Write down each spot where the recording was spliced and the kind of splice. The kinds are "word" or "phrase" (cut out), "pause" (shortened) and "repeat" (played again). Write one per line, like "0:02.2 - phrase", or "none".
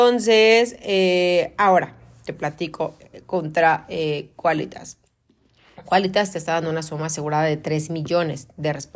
none